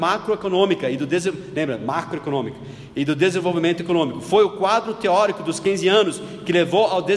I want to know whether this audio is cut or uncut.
uncut